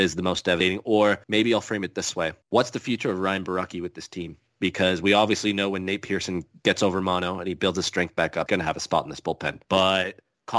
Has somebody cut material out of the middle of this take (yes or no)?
yes